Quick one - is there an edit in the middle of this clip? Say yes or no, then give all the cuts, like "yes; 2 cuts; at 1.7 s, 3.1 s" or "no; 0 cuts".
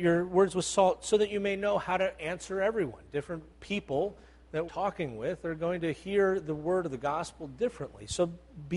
yes; 2 cuts; at 3.5 s, 4.7 s